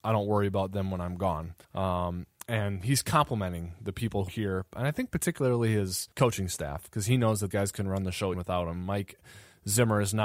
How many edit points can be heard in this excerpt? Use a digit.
5